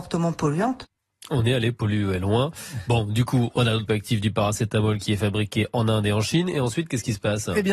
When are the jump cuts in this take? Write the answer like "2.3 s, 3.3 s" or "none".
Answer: 3.9 s